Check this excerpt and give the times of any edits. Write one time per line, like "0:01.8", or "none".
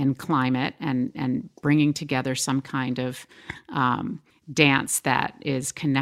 none